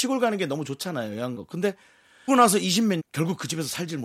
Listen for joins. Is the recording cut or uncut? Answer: cut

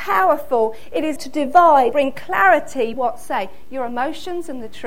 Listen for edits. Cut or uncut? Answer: cut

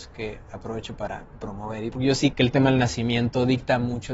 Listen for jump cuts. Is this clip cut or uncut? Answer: cut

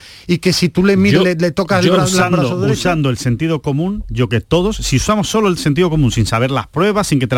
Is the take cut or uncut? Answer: cut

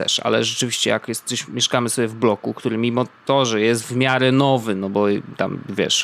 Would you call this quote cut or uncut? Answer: uncut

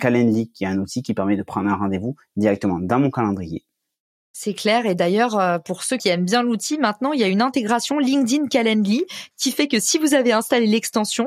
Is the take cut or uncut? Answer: uncut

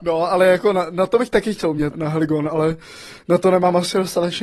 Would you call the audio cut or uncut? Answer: cut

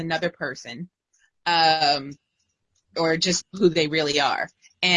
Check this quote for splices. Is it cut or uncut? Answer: cut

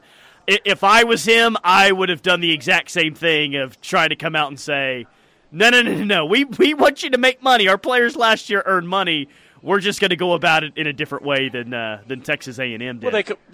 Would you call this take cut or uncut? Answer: uncut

